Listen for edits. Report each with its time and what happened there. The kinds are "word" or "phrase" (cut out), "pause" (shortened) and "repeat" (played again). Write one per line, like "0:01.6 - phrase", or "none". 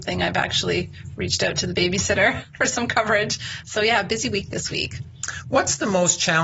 none